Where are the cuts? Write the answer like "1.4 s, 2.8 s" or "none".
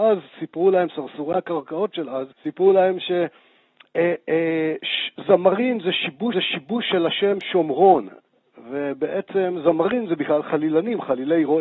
2.3 s, 6.3 s